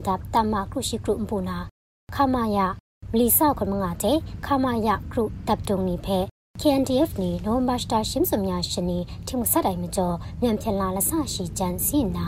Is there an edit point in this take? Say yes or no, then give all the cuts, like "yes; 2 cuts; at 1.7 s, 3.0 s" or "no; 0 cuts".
no; 0 cuts